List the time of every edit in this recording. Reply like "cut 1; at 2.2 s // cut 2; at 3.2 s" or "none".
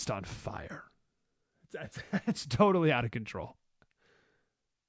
none